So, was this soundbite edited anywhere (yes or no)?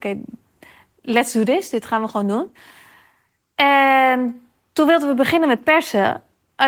no